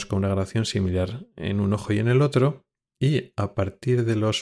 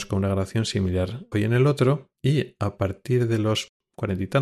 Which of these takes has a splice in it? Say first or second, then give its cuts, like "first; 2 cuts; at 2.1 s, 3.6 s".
second; 2 cuts; at 1.3 s, 2.1 s